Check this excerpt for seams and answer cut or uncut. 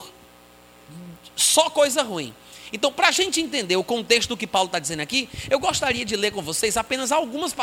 uncut